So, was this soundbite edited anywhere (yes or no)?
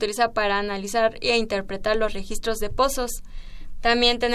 no